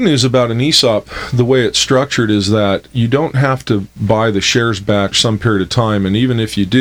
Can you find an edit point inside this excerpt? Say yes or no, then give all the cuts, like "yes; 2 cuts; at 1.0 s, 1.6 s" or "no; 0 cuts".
yes; 2 cuts; at 2.9 s, 5.1 s